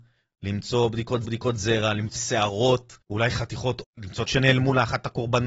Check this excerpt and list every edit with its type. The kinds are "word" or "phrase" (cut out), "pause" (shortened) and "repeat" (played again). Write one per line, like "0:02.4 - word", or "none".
0:01.2 - repeat
0:02.2 - word
0:03.0 - pause
0:03.8 - word
0:04.3 - phrase